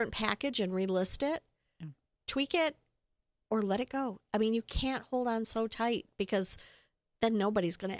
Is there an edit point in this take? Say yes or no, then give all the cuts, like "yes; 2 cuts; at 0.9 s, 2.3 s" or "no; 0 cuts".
no; 0 cuts